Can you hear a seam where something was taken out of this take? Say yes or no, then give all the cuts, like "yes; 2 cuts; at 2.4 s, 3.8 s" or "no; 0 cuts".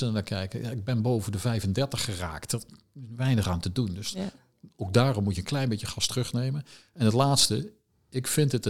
no; 0 cuts